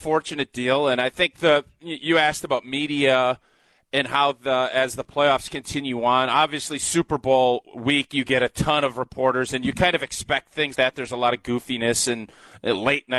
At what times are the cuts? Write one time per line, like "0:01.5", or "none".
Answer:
0:10.7